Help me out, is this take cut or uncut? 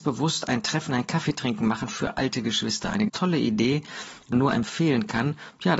cut